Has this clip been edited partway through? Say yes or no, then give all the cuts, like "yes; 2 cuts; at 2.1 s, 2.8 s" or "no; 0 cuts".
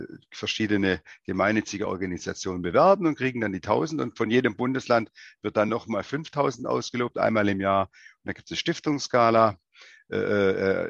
no; 0 cuts